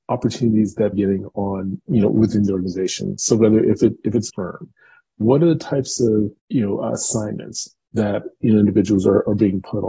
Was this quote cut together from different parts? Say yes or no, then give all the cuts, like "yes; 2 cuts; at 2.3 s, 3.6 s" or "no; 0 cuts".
yes; 3 cuts; at 0.9 s, 4.3 s, 6.4 s